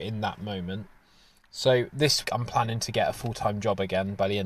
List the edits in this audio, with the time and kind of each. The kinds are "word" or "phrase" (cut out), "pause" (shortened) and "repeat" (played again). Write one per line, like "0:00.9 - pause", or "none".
0:02.2 - word